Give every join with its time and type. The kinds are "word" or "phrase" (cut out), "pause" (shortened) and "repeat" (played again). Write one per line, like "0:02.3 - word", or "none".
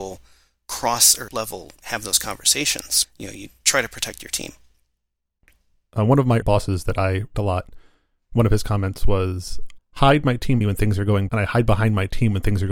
0:01.3 - word
0:03.0 - word
0:06.4 - word
0:07.3 - word
0:09.8 - word
0:10.6 - word
0:11.3 - word